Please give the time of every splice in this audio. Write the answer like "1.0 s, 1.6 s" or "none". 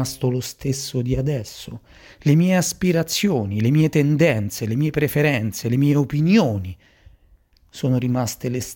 none